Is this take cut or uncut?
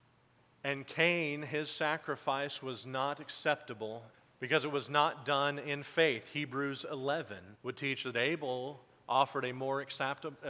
cut